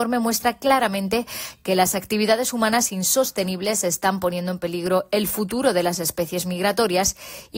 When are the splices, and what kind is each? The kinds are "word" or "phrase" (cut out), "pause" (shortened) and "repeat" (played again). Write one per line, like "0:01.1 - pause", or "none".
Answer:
none